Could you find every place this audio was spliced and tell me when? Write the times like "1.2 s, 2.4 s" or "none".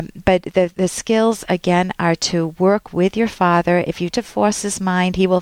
4.1 s